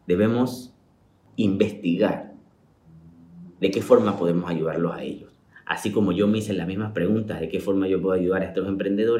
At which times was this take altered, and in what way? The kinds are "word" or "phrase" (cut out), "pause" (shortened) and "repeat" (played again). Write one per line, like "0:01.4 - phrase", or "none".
none